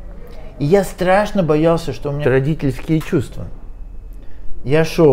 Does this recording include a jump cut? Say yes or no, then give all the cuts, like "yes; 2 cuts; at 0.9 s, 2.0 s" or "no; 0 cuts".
yes; 1 cut; at 2.2 s